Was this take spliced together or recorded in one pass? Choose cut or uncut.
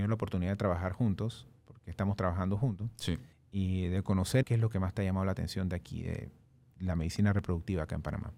cut